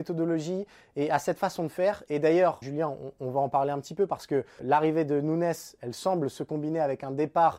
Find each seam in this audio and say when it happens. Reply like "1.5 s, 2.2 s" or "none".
2.6 s, 4.6 s